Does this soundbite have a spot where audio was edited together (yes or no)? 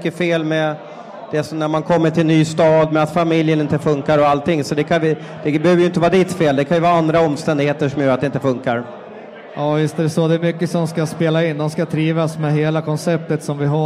no